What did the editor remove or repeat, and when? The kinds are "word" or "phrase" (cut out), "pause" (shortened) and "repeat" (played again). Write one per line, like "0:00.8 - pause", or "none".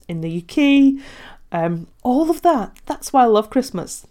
0:01.9 - pause